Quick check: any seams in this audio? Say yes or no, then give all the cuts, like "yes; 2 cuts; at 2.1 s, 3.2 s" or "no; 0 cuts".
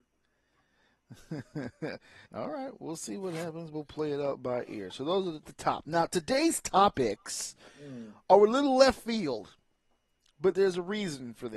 yes; 2 cuts; at 2.3 s, 5.4 s